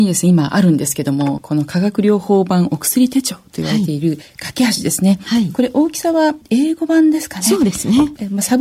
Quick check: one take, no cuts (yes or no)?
yes